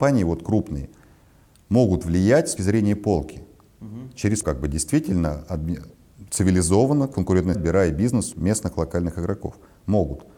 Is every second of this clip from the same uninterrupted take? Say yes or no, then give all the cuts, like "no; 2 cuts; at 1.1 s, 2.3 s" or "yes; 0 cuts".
no; 4 cuts; at 2.6 s, 4.4 s, 7.5 s, 8.3 s